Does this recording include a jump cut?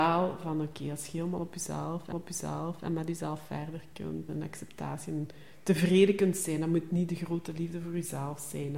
yes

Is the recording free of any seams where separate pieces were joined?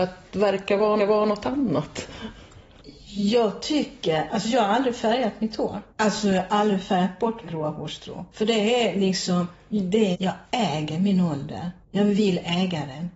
no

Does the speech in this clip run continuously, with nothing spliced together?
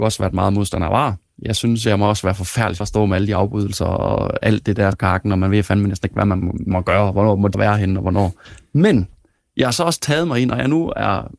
no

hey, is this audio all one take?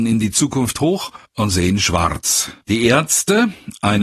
no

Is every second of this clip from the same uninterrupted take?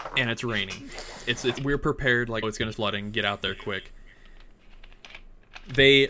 no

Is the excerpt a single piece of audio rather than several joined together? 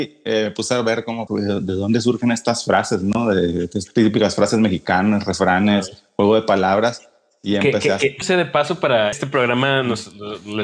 no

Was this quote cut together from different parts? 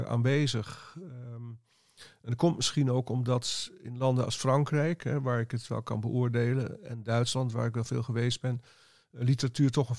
no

